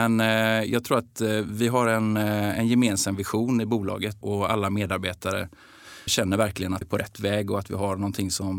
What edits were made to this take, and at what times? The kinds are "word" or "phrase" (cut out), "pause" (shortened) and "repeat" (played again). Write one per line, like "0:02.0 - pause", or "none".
0:04.2 - word
0:06.1 - word
0:06.8 - word